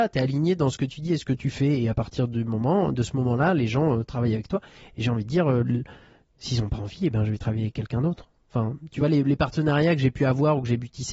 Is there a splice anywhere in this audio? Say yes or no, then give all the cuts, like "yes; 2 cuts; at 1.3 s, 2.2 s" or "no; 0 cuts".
no; 0 cuts